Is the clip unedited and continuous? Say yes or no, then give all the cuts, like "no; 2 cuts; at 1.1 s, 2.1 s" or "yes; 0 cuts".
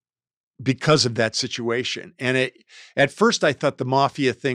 yes; 0 cuts